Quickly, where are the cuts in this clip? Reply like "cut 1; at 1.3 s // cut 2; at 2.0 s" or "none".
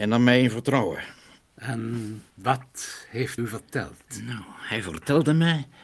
cut 1; at 2.3 s // cut 2; at 3.4 s